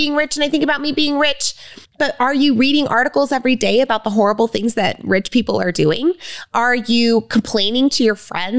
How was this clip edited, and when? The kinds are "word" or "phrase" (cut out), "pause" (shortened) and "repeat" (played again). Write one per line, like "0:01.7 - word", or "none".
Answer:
0:01.8 - pause